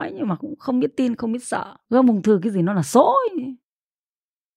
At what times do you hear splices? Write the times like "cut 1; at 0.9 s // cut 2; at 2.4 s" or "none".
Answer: cut 1; at 1.8 s